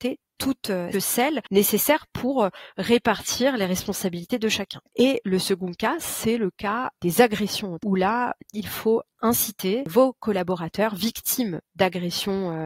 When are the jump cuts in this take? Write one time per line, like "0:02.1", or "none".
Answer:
0:00.9
0:04.9
0:07.8